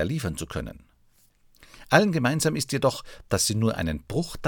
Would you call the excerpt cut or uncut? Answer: uncut